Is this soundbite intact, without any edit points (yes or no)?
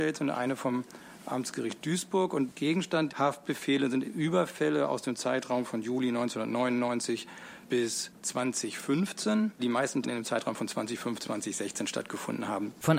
no